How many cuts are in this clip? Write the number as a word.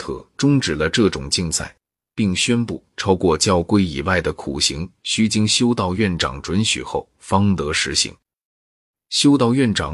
zero